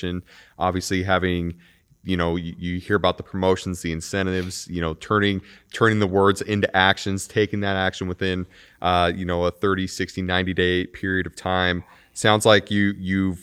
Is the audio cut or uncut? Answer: uncut